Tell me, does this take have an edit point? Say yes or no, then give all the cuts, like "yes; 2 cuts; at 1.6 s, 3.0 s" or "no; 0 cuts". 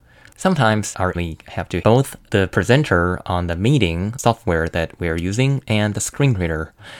yes; 2 cuts; at 1.1 s, 1.8 s